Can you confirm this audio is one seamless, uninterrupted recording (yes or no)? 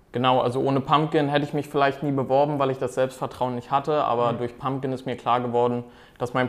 yes